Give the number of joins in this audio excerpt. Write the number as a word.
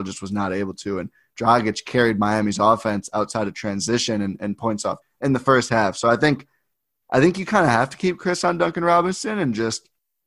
one